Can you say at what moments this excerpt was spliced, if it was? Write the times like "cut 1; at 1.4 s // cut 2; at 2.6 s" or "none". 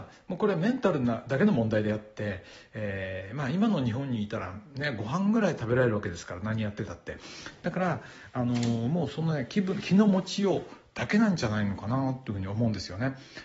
none